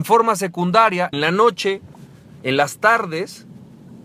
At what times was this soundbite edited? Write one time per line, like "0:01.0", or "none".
0:01.1